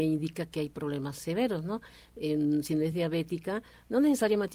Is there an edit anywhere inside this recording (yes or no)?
no